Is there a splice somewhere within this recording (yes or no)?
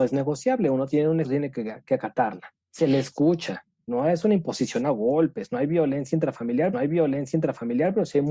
yes